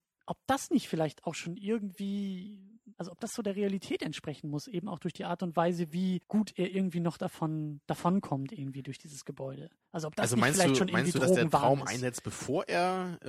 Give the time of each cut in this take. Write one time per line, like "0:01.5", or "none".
0:02.9
0:06.2